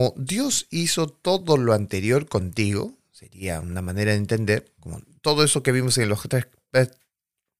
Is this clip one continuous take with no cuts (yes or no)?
yes